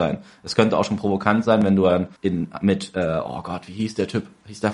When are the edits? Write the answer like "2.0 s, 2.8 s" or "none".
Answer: 2.2 s